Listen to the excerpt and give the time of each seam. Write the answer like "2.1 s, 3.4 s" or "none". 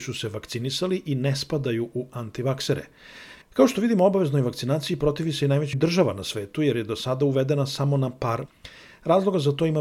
3.4 s, 5.7 s, 8.4 s